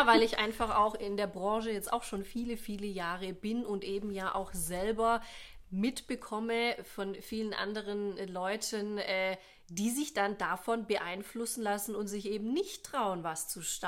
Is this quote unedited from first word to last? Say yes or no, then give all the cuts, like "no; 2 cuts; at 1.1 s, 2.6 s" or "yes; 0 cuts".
yes; 0 cuts